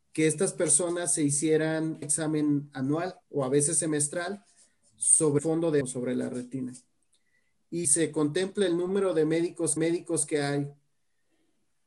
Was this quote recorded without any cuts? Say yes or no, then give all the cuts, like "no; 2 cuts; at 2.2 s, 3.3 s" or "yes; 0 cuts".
no; 6 cuts; at 2.0 s, 3.2 s, 5.4 s, 5.8 s, 7.8 s, 9.8 s